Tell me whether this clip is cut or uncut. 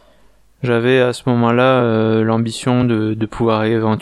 uncut